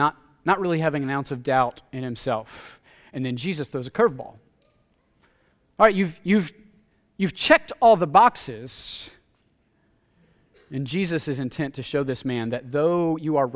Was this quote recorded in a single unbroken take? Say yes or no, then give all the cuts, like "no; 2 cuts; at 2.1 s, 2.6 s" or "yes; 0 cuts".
yes; 0 cuts